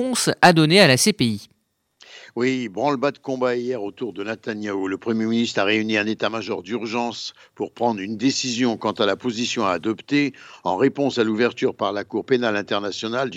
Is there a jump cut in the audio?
no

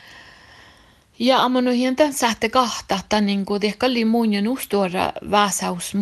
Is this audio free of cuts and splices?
yes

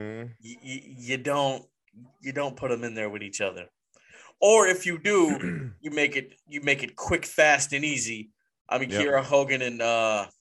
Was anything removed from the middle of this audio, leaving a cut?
no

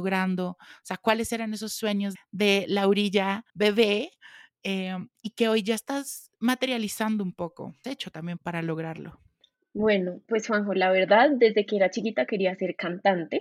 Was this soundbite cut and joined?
yes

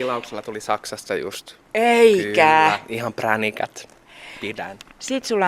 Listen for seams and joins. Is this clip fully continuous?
yes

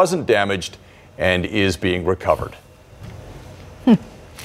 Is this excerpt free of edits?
yes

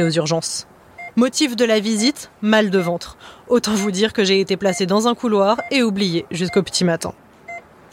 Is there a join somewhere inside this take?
no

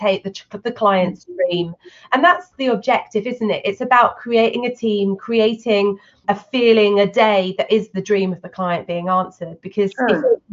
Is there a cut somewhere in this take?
yes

